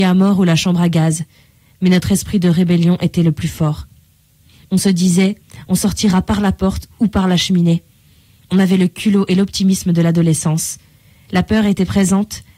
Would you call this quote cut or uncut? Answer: uncut